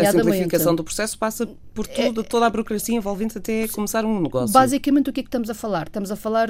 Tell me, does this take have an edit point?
no; 0 cuts

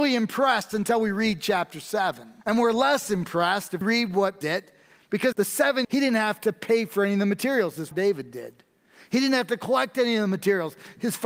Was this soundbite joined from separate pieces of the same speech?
yes; 6 cuts; at 2.4 s, 3.8 s, 4.4 s, 5.3 s, 5.8 s, 7.9 s

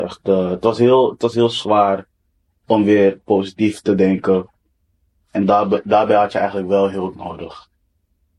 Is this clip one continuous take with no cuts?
yes; 0 cuts

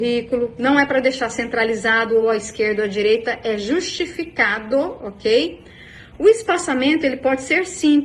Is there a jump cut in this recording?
no; 0 cuts

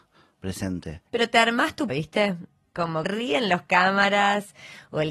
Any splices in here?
yes; 3 cuts; at 1.1 s, 1.9 s, 3.0 s

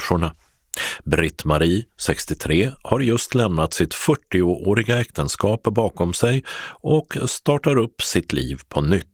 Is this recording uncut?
yes; 0 cuts

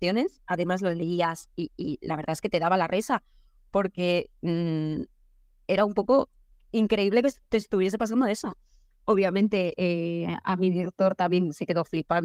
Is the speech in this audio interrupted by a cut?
no; 0 cuts

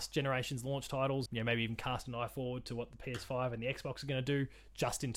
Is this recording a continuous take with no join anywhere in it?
no; 1 cut; at 1.3 s

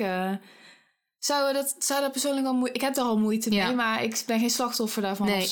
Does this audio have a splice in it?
no; 0 cuts

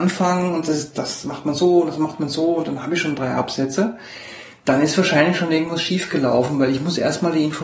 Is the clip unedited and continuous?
yes; 0 cuts

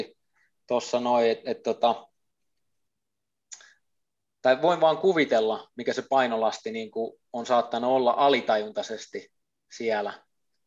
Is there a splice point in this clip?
no; 0 cuts

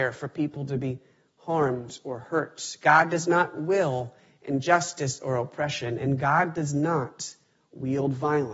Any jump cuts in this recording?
no; 0 cuts

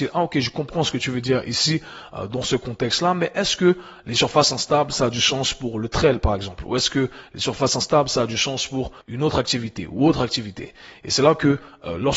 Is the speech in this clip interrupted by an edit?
yes; 1 cut; at 9.0 s

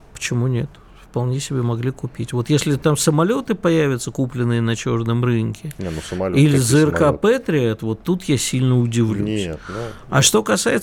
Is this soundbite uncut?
yes; 0 cuts

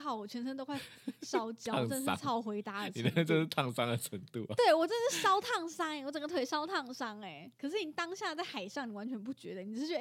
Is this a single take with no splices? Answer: no; 1 cut; at 7.5 s

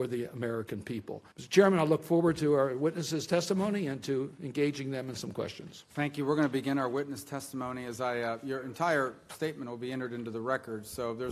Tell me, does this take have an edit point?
yes; 2 cuts; at 1.3 s, 5.9 s

